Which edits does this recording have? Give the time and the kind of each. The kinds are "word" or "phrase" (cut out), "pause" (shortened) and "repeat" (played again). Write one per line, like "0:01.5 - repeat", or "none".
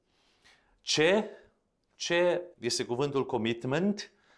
0:02.5 - word

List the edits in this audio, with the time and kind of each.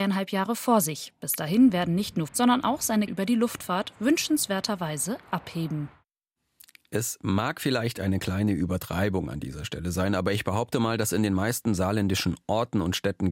0:02.3 - word
0:03.1 - word

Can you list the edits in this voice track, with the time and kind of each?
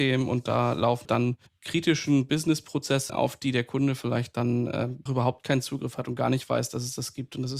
0:01.0 - word
0:01.5 - pause
0:03.1 - word
0:05.1 - word

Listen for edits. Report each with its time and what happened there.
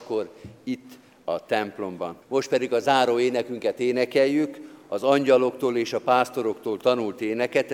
0:02.2 - pause

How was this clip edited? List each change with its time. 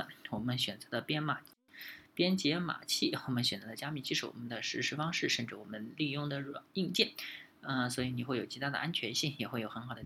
none

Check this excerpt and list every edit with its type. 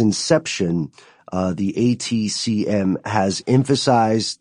none

